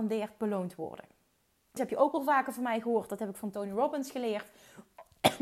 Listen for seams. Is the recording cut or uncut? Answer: cut